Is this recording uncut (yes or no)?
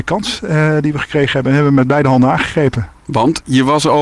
yes